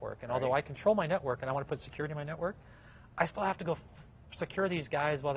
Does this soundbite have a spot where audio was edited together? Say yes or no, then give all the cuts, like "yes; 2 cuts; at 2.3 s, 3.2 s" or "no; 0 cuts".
no; 0 cuts